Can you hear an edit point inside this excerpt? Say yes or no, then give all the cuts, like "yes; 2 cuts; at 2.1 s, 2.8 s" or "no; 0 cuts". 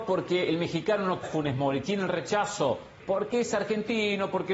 yes; 2 cuts; at 1.2 s, 3.0 s